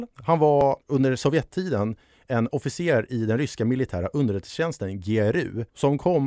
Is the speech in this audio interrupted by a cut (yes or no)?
no